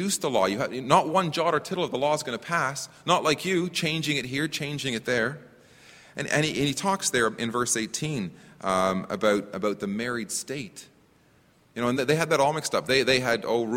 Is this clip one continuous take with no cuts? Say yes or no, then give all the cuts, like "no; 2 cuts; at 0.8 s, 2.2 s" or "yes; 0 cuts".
yes; 0 cuts